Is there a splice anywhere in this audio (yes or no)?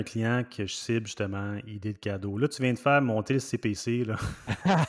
no